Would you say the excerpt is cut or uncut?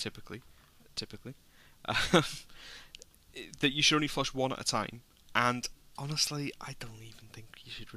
uncut